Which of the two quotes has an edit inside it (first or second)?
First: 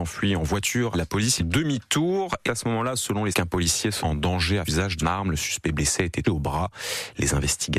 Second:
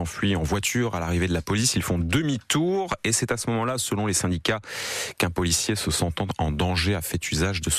first